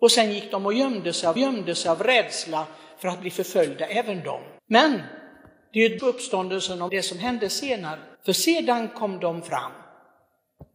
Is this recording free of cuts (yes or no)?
no